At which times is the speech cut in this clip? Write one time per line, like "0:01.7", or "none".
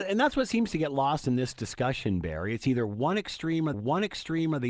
0:03.7